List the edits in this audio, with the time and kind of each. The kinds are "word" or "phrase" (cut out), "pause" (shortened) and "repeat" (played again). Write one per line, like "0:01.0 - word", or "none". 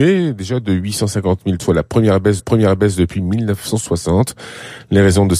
0:01.6 - word
0:02.4 - repeat